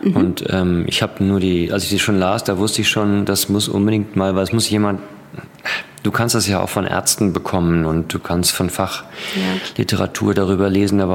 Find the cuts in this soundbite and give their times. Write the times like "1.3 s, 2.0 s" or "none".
1.7 s